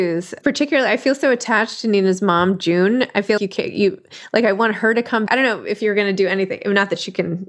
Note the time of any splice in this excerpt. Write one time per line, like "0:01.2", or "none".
0:03.4
0:05.3

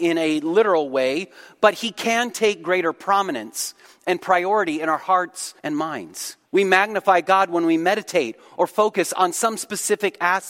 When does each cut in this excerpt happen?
0:05.6
0:06.5

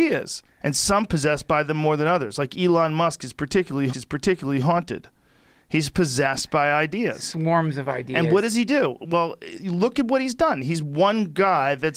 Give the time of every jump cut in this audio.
0:03.9

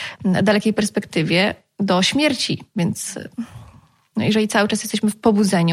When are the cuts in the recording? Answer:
none

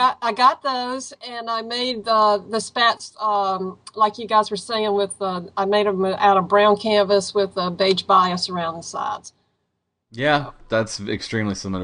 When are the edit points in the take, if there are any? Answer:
none

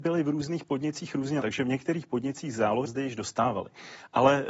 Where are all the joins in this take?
0:01.4
0:02.8

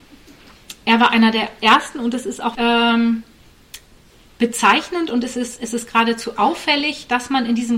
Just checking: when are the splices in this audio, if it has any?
0:02.5

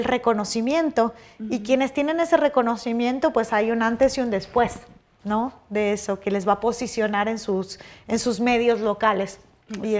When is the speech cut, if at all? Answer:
none

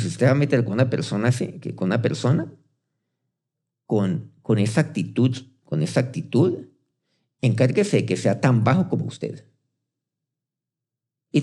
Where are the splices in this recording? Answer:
none

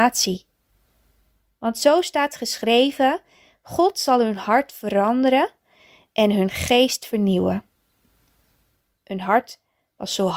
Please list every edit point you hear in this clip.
none

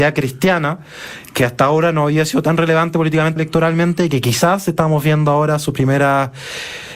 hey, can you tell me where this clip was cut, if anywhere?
0:03.4

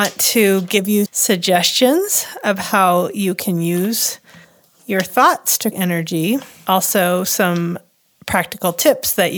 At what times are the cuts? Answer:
0:01.1
0:05.7

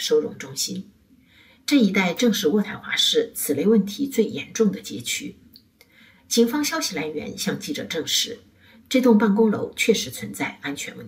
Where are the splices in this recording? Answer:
none

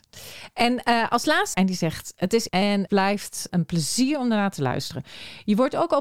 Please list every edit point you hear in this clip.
0:01.5
0:02.5
0:02.9
0:03.5

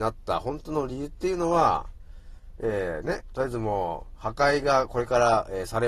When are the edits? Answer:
none

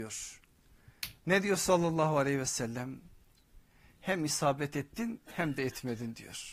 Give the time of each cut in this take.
none

